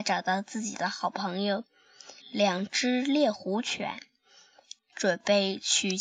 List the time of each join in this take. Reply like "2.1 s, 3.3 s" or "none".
2.2 s